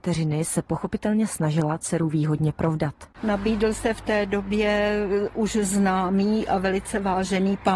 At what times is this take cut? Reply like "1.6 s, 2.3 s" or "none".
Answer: none

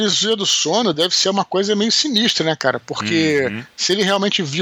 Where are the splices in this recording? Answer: none

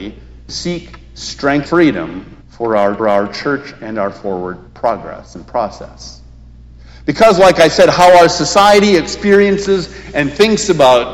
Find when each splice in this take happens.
1.7 s, 2.4 s, 3.0 s, 4.7 s

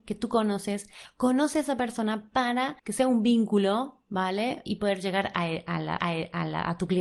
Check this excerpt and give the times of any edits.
2.8 s, 4.7 s, 6.0 s

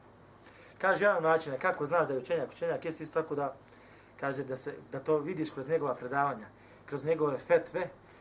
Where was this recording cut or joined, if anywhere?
none

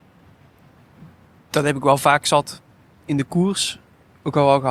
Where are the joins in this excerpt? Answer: none

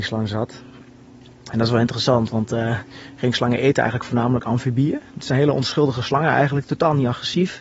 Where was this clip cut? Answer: none

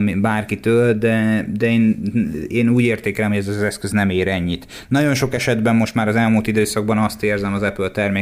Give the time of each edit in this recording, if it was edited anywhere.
none

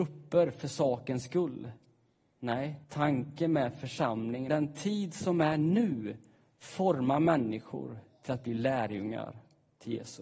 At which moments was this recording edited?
2.8 s, 4.5 s

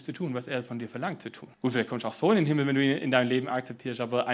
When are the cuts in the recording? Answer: 1.5 s

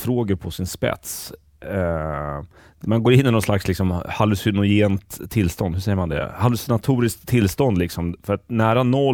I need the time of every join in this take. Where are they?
none

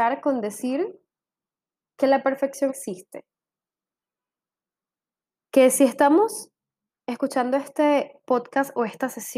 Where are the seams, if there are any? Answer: 2.7 s

